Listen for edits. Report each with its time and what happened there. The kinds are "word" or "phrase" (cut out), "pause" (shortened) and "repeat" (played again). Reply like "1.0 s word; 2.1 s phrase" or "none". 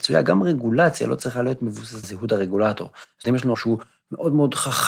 2.0 s word; 3.2 s word; 3.5 s word